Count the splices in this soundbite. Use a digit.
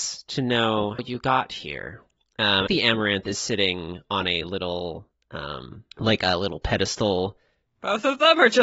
3